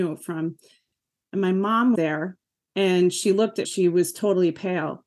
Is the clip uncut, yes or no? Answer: no